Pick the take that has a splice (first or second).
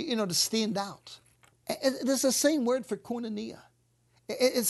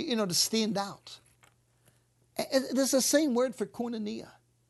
first